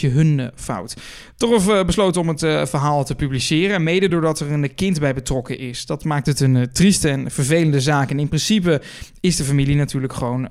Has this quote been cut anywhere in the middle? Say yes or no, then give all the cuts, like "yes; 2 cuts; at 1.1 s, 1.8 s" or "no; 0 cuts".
no; 0 cuts